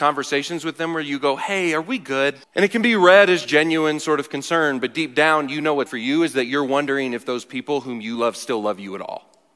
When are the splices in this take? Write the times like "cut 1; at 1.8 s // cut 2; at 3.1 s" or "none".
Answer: cut 1; at 2.4 s // cut 2; at 3.4 s // cut 3; at 5.9 s